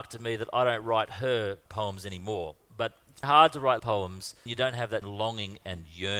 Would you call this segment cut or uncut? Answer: cut